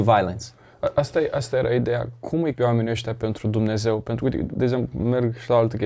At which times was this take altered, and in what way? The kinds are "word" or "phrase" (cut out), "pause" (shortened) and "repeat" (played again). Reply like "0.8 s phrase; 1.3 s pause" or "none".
2.6 s word